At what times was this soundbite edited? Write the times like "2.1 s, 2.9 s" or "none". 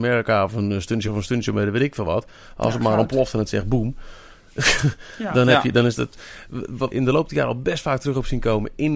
1.1 s, 6.9 s